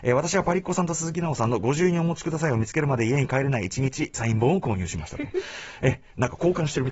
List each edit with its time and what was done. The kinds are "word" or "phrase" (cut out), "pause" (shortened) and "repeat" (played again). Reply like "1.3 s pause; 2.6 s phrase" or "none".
4.1 s phrase